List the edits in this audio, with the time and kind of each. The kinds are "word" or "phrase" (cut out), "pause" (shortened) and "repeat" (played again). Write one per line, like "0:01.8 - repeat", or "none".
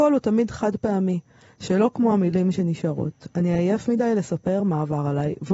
none